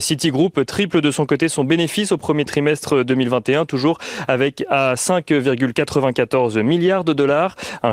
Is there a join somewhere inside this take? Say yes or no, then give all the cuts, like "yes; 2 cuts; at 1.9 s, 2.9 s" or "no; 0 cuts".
no; 0 cuts